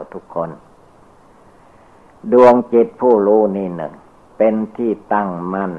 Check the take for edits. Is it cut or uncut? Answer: uncut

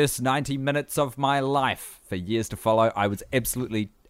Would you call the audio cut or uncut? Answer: uncut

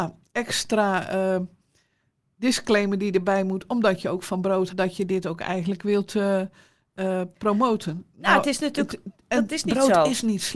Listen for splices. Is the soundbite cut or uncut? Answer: cut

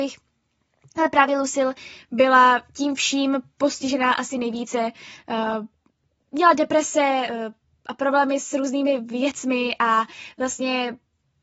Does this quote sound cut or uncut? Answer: uncut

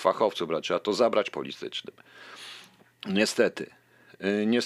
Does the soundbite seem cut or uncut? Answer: cut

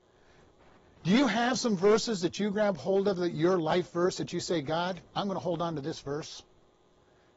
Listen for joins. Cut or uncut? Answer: cut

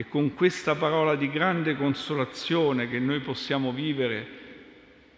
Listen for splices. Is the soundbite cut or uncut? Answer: uncut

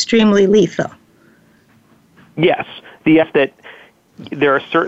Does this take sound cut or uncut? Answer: cut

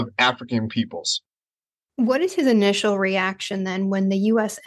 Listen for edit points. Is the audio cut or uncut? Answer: uncut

